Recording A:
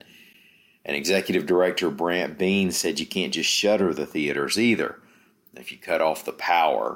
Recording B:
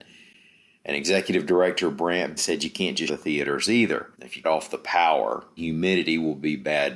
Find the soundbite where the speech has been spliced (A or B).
B